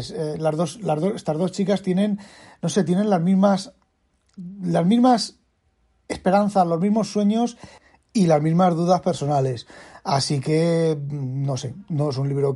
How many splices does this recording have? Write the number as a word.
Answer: zero